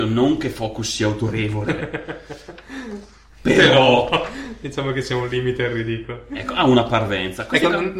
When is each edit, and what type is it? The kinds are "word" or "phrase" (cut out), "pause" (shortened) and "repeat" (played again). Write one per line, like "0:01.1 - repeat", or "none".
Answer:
none